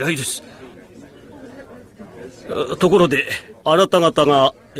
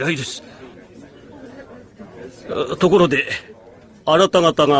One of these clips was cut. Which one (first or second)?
first